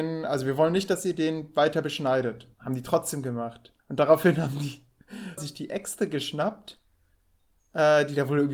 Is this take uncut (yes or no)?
no